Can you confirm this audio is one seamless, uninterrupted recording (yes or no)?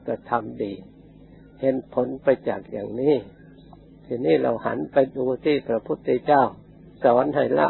yes